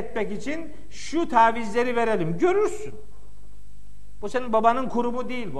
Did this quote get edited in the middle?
no; 0 cuts

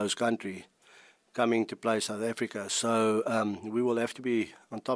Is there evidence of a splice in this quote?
no; 0 cuts

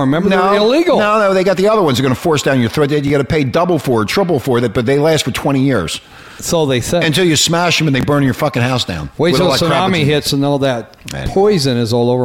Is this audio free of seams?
yes; 0 cuts

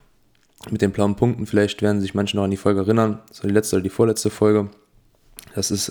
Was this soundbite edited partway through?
no; 0 cuts

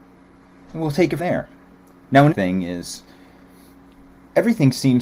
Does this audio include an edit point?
yes; 2 cuts; at 1.2 s, 2.3 s

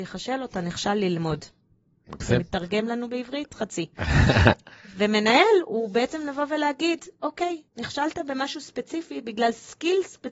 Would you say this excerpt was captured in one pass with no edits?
no; 1 cut; at 7.7 s

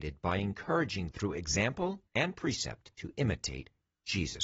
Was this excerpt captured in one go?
no; 3 cuts; at 1.1 s, 2.1 s, 2.9 s

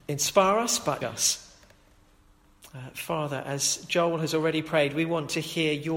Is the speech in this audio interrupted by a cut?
yes; 1 cut; at 1.0 s

